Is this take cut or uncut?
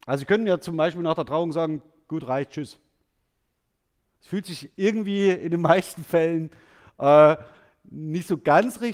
uncut